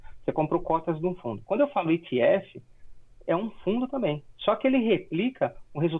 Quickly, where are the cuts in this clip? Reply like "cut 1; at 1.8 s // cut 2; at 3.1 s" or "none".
none